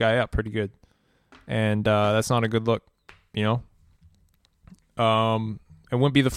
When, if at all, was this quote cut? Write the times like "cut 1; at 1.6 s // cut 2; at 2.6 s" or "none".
none